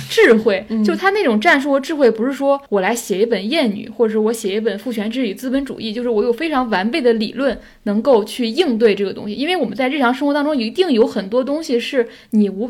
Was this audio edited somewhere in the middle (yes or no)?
yes